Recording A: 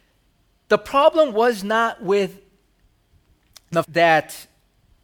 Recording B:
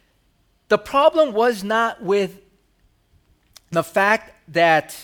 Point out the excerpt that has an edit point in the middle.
A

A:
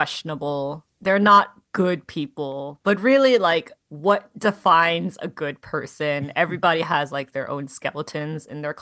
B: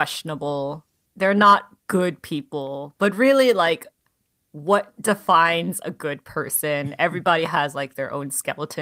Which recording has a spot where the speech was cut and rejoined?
A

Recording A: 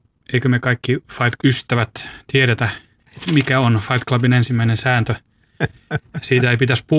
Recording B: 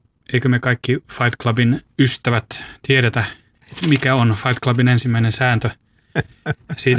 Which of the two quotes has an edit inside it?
A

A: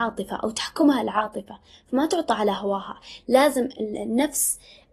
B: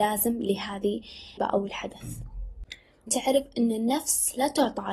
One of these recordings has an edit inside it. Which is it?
B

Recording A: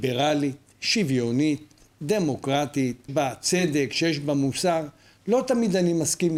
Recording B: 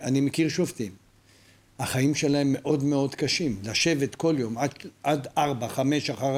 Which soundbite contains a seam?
A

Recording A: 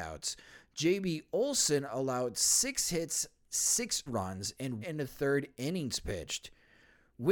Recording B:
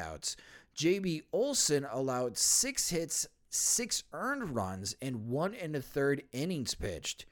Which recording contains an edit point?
A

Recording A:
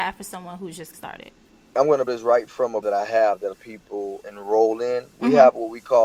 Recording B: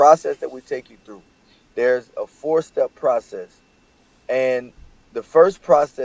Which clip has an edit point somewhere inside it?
A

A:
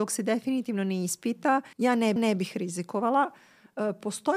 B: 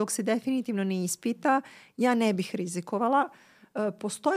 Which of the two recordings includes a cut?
A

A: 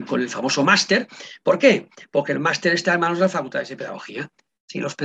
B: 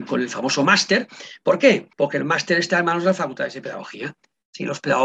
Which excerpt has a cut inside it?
B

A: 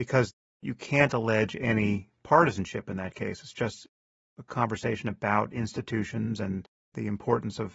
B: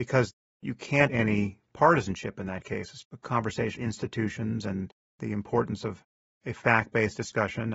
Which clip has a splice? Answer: B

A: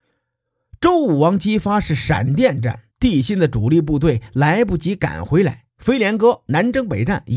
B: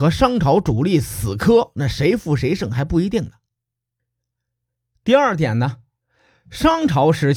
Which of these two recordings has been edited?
A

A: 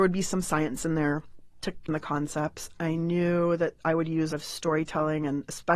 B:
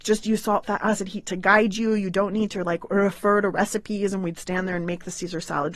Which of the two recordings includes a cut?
A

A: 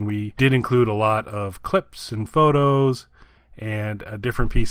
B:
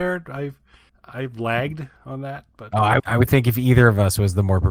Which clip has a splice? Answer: B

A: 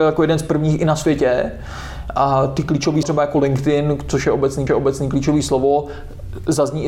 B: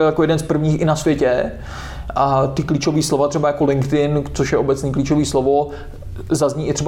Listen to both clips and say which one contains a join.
A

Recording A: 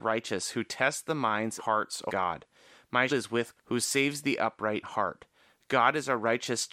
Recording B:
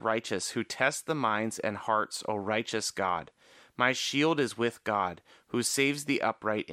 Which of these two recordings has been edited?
A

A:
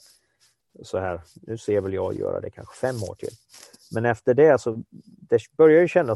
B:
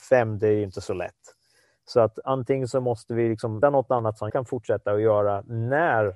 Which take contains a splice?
B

